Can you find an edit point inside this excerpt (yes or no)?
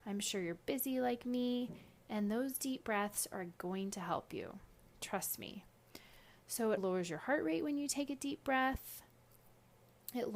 yes